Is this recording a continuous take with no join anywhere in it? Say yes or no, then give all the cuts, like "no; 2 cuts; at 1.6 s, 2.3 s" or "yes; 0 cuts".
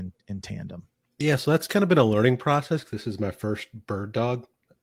no; 1 cut; at 1.0 s